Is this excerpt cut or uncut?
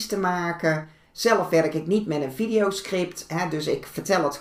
uncut